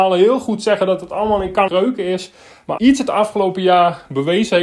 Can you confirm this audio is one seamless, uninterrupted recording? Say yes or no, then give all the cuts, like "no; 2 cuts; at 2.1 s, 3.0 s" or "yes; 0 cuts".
no; 2 cuts; at 1.7 s, 2.8 s